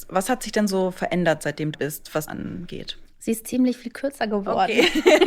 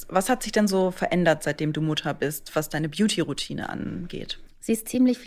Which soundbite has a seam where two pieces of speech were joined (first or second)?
first